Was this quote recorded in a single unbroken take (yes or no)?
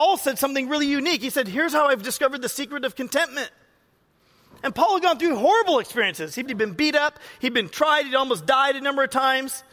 no